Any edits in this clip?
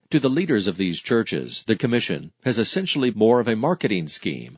yes; 2 cuts; at 1.8 s, 3.1 s

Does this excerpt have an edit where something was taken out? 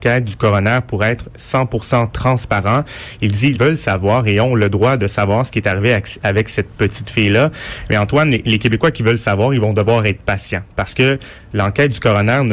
yes; 1 cut; at 3.5 s

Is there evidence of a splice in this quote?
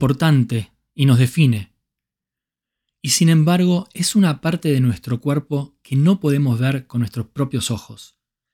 no; 0 cuts

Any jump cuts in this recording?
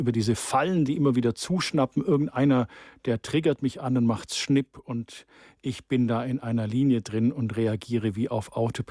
no; 0 cuts

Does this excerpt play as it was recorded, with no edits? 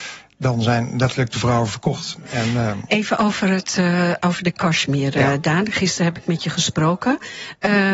yes; 0 cuts

